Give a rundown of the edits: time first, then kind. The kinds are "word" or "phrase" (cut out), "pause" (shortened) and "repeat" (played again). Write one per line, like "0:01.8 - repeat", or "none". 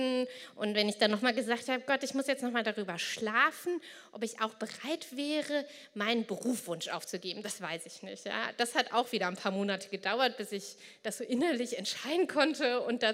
none